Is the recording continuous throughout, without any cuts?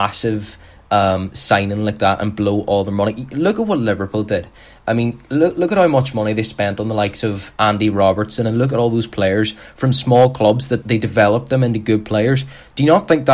no; 1 cut; at 10.8 s

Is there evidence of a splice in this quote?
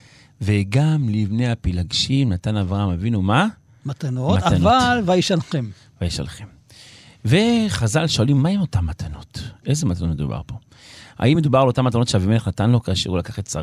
no; 0 cuts

